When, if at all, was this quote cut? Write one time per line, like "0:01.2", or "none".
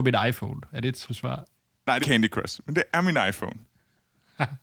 0:01.1
0:01.5
0:02.0